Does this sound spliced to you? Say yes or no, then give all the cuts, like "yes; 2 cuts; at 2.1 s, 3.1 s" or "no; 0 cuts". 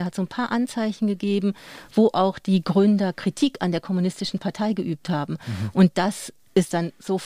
no; 0 cuts